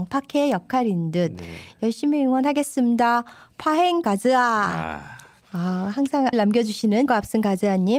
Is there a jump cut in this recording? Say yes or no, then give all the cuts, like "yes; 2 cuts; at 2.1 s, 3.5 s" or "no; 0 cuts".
yes; 3 cuts; at 4.0 s, 6.3 s, 7.1 s